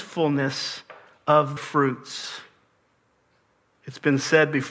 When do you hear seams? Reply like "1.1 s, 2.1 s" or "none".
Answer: 1.6 s